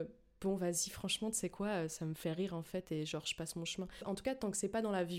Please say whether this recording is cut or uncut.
uncut